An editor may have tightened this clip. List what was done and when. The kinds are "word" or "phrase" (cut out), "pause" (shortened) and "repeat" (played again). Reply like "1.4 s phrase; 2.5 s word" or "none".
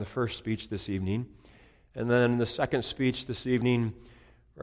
none